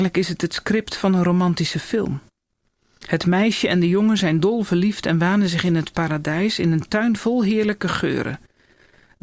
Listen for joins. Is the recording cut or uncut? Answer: uncut